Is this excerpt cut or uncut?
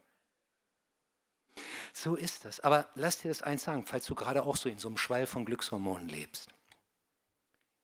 uncut